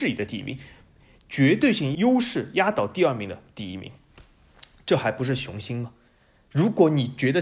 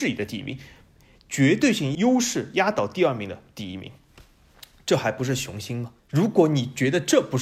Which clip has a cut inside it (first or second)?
second